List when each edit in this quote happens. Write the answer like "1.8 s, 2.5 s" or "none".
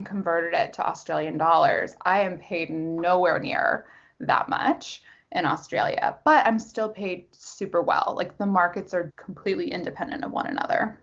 9.1 s